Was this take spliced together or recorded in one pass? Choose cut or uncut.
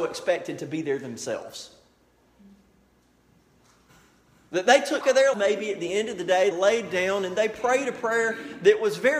cut